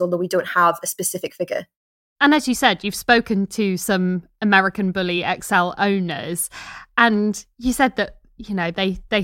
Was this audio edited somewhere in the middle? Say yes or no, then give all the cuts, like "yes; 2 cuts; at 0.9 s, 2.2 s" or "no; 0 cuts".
no; 0 cuts